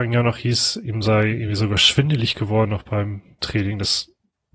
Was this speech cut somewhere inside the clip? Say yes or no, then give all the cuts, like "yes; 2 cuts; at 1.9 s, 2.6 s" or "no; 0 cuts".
no; 0 cuts